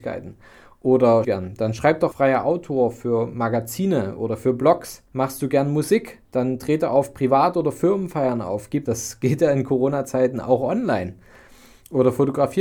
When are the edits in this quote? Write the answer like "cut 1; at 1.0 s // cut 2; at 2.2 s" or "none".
cut 1; at 1.2 s // cut 2; at 2.1 s // cut 3; at 5.1 s // cut 4; at 6.2 s // cut 5; at 8.9 s